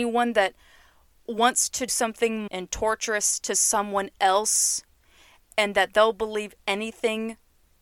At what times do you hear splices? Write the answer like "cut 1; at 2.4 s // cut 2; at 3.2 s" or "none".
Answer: cut 1; at 1.9 s // cut 2; at 2.5 s